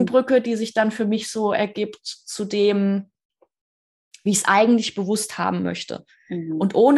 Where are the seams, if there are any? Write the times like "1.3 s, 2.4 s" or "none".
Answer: none